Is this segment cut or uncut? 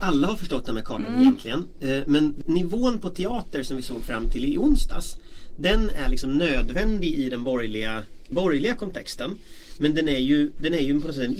cut